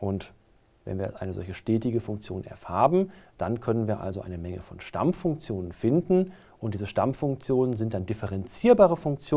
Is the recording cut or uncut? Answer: uncut